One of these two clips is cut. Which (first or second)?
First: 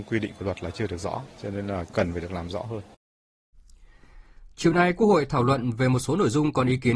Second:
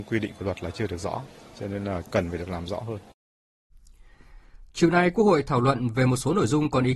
first